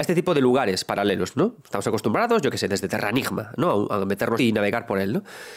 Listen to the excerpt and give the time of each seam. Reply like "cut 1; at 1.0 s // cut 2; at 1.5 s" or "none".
cut 1; at 4.4 s

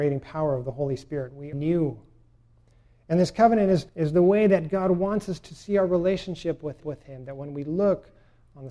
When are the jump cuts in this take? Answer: cut 1; at 1.5 s // cut 2; at 3.9 s // cut 3; at 6.8 s

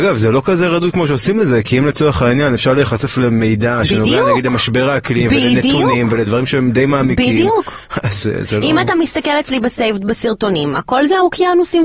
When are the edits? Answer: none

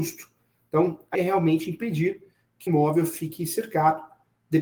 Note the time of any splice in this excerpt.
cut 1; at 1.1 s // cut 2; at 2.7 s

